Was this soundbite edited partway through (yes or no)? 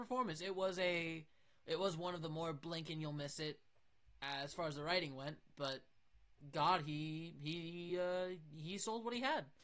no